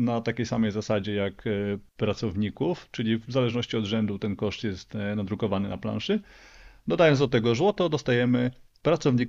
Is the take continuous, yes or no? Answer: no